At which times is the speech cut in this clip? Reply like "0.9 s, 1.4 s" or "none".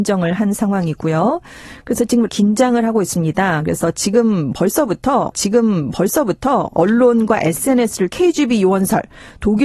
2.3 s, 5.3 s, 8.1 s